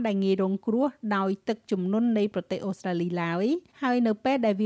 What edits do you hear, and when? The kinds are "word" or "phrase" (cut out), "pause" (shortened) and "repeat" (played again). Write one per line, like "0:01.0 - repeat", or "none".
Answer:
0:03.7 - pause